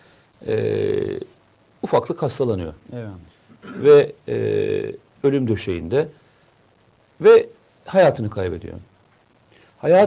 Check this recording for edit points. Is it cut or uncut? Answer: uncut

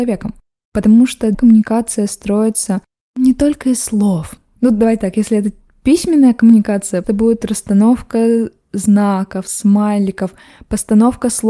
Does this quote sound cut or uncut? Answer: cut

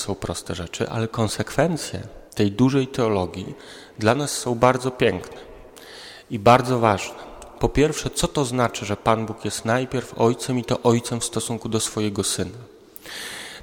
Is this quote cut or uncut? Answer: cut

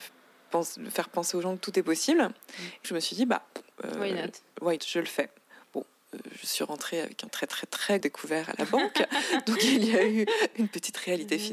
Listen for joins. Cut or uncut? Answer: cut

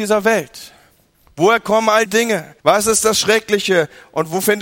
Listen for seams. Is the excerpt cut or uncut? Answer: cut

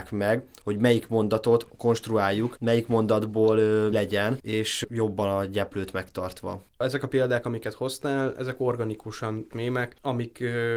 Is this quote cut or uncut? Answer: cut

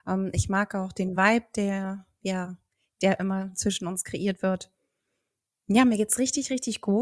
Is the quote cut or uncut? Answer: uncut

